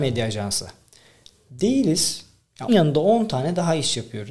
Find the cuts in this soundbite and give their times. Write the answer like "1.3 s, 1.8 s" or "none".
2.7 s